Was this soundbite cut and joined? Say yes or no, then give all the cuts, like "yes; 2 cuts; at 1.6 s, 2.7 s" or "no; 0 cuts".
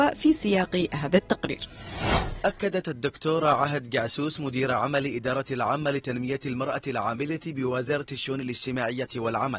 no; 0 cuts